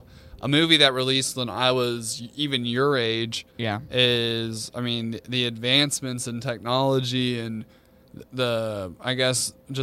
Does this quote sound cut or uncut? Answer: cut